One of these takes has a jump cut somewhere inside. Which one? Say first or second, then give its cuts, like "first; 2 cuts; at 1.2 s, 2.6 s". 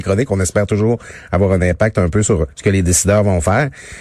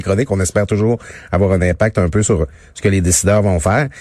first; 1 cut; at 2.5 s